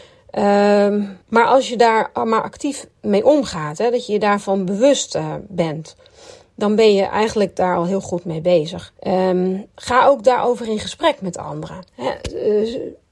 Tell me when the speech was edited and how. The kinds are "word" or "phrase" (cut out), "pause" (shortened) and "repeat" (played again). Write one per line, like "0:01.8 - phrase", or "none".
0:01.2 - pause
0:03.0 - pause
0:09.0 - pause
0:11.9 - pause